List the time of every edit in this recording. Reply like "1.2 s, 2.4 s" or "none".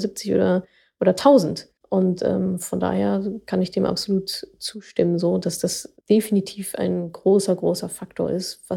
1.8 s, 6.0 s

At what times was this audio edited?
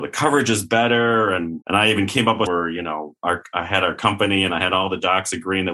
1.6 s, 2.5 s

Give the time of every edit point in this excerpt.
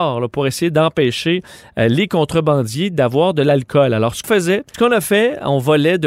4.2 s, 4.7 s

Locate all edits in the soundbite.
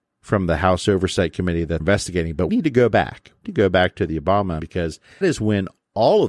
1.8 s, 2.5 s, 3.4 s, 4.6 s, 5.2 s

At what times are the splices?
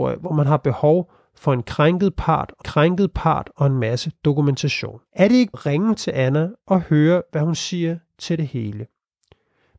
2.6 s, 5.1 s, 5.5 s

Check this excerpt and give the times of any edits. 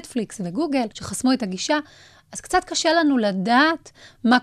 0.9 s

